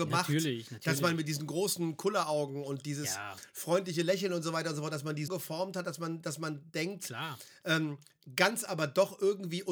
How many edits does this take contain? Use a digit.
2